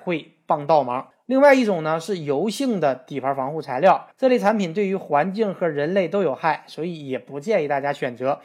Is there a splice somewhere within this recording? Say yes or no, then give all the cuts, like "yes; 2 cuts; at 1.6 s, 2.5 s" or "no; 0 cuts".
yes; 1 cut; at 4.1 s